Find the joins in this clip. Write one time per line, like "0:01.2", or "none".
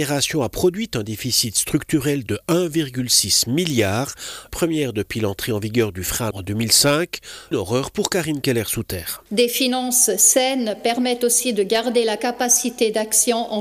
0:04.5
0:06.3
0:07.5